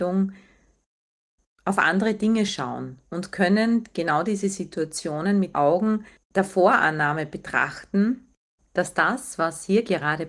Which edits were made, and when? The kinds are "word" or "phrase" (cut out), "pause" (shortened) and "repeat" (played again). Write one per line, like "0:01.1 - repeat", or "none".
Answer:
0:05.5 - word